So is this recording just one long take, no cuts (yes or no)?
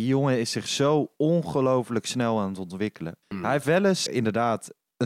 no